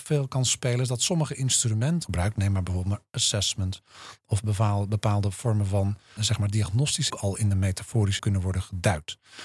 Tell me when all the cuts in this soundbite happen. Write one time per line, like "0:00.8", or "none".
0:02.0
0:06.2
0:07.1
0:08.2

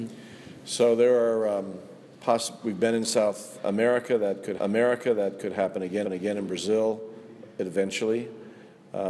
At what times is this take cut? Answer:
0:02.1
0:04.6
0:06.1

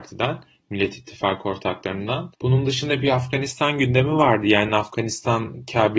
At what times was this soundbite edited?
none

